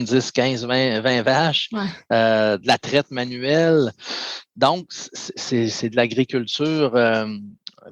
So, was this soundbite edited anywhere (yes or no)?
no